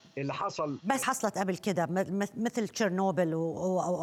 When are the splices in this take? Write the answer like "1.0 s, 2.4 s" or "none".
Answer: 1.0 s